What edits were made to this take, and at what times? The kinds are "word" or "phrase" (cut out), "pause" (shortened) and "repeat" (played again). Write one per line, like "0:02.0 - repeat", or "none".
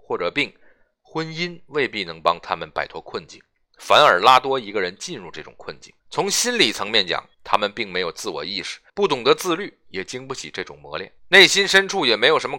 0:06.0 - pause
0:07.3 - pause
0:08.9 - pause
0:11.2 - pause